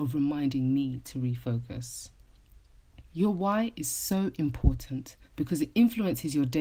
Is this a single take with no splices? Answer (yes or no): no